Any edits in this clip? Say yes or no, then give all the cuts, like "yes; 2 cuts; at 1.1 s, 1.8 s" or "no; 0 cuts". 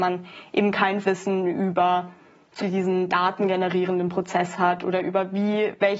yes; 2 cuts; at 1.0 s, 2.6 s